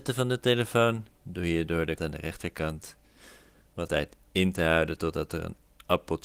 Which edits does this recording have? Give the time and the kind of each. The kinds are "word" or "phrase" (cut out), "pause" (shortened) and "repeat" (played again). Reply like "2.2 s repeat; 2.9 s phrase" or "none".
1.2 s pause; 2.0 s phrase; 3.9 s word

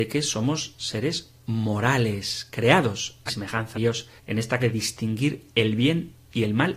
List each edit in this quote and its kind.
3.3 s phrase; 3.7 s word; 4.2 s pause; 4.6 s word

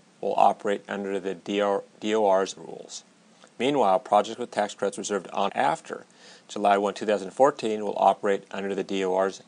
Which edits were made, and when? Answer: 2.6 s word; 3.3 s pause; 5.5 s word

